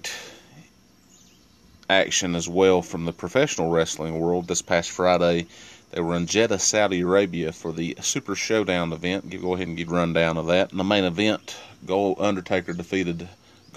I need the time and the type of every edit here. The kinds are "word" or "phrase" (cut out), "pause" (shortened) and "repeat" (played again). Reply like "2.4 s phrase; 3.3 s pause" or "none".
9.9 s phrase